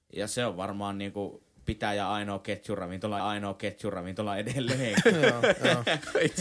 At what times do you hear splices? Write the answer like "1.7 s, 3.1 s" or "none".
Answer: 3.2 s